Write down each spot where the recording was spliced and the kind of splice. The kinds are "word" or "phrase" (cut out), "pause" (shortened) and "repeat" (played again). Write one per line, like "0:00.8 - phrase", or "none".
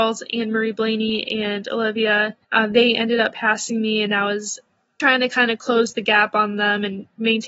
0:02.4 - pause
0:05.0 - word